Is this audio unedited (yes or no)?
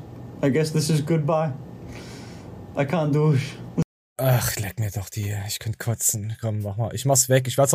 yes